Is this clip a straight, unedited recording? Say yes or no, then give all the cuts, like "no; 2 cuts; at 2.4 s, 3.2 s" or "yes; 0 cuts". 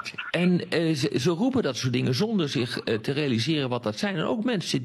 yes; 0 cuts